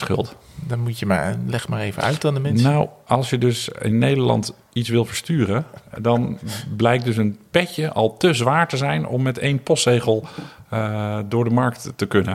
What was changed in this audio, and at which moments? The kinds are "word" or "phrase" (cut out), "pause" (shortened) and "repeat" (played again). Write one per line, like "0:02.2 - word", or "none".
none

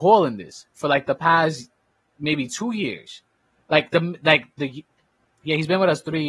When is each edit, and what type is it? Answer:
none

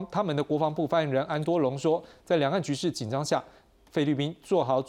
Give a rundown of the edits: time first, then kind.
none

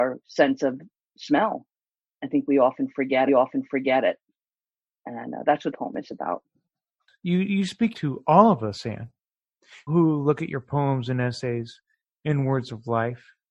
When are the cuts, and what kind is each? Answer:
0:03.3 - repeat
0:05.7 - word
0:07.9 - word
0:09.9 - word

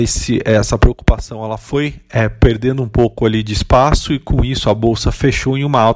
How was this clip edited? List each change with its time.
none

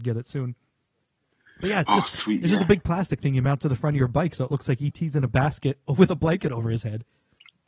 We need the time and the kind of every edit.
none

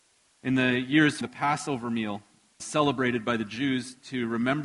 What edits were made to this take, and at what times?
0:01.2 - word
0:02.6 - word

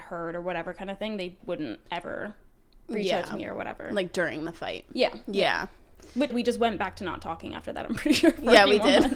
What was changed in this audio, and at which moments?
0:01.4 - word
0:06.3 - word

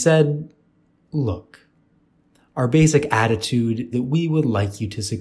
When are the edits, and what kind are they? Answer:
0:03.9 - word

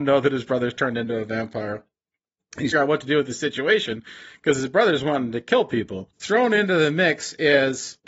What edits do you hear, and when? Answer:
0:02.7 - phrase

